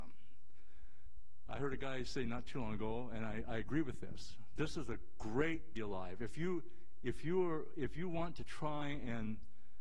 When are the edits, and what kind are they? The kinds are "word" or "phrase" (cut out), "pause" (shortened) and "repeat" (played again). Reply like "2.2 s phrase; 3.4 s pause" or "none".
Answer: 4.6 s word; 5.8 s phrase